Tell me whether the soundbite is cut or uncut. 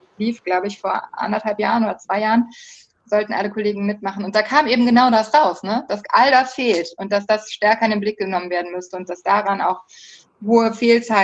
uncut